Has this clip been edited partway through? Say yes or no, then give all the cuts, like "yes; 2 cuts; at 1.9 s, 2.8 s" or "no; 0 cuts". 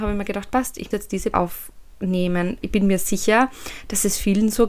yes; 3 cuts; at 0.9 s, 1.3 s, 2.6 s